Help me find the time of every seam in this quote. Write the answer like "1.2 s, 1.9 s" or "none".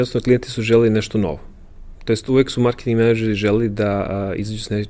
none